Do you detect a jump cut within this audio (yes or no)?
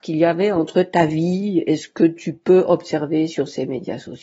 no